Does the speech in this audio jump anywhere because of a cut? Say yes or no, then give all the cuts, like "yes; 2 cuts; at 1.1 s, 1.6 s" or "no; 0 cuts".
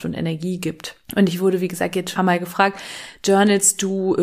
yes; 2 cuts; at 1.0 s, 2.2 s